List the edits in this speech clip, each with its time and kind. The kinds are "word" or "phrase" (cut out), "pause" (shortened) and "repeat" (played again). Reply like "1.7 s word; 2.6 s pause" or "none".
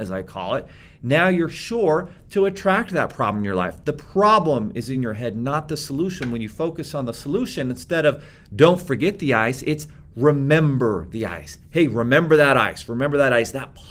none